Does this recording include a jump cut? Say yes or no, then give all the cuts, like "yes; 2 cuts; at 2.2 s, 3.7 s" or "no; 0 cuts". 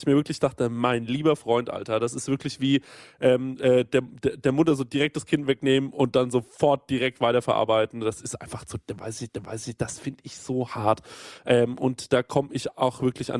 yes; 1 cut; at 9.3 s